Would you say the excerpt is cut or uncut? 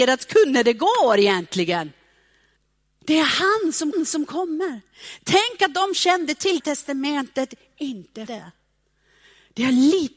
cut